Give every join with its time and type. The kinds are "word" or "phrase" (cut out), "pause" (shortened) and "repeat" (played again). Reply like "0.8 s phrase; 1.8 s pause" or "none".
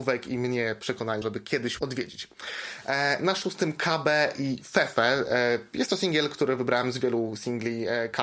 1.2 s phrase; 1.8 s word